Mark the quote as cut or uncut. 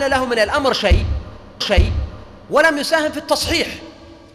cut